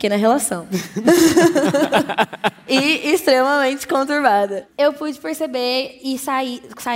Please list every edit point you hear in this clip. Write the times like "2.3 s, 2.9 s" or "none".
none